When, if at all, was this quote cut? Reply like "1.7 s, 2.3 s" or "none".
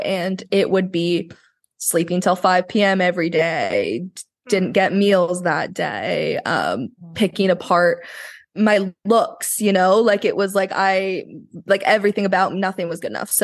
none